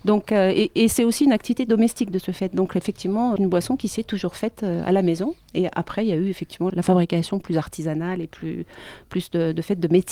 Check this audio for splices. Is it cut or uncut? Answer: cut